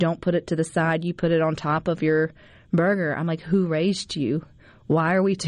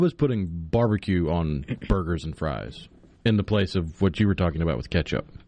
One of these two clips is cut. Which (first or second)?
second